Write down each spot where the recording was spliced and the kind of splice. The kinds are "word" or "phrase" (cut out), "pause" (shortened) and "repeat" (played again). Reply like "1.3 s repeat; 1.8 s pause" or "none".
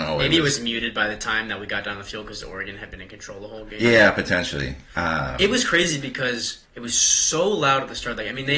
6.6 s pause